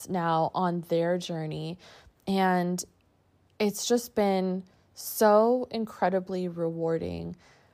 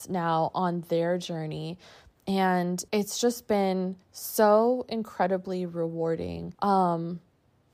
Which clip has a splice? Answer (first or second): second